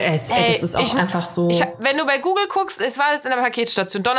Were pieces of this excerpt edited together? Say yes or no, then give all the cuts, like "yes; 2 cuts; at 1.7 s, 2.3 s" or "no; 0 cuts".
no; 0 cuts